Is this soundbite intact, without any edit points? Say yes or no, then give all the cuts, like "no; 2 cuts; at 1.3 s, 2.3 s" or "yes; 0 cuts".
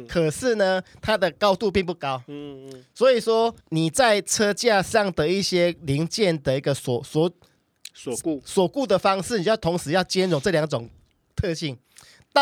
no; 1 cut; at 3.6 s